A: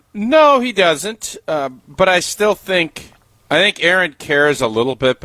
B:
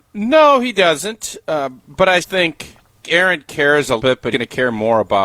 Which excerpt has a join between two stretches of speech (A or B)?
B